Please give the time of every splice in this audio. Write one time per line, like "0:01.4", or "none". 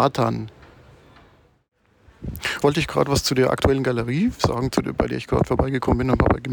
0:02.6

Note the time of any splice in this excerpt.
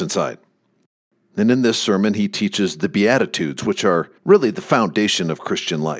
0:04.2

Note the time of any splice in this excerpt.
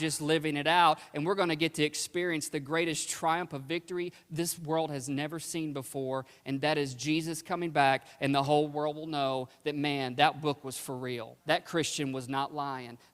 0:11.4

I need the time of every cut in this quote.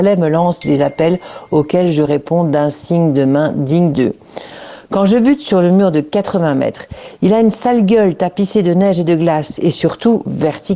0:03.9

